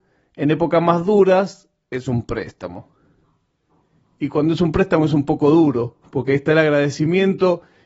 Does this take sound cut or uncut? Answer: uncut